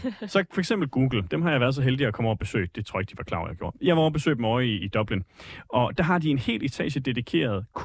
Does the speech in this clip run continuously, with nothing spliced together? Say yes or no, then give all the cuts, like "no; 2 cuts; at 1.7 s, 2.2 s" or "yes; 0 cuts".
yes; 0 cuts